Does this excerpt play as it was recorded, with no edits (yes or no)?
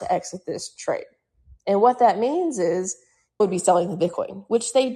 no